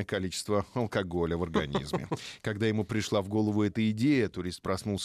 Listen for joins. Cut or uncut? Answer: uncut